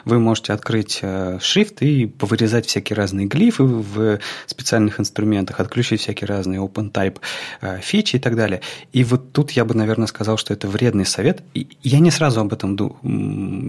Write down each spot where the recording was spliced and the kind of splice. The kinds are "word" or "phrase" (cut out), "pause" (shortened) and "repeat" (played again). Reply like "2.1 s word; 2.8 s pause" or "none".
none